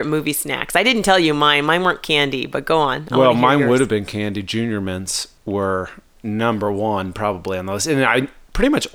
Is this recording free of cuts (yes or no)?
no